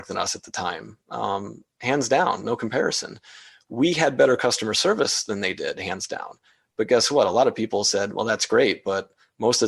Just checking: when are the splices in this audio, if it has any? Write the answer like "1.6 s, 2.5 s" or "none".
none